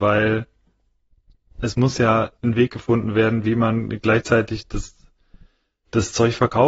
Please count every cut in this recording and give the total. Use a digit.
1